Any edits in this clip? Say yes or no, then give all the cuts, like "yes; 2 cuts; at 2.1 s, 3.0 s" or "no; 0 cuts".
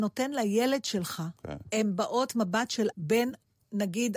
yes; 2 cuts; at 2.3 s, 2.9 s